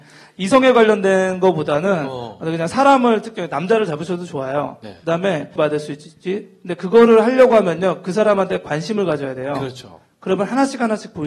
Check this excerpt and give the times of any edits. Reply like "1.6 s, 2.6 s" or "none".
5.6 s